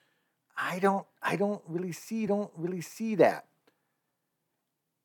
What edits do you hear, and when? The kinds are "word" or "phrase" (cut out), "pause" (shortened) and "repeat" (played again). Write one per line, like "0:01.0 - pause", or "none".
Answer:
0:02.3 - repeat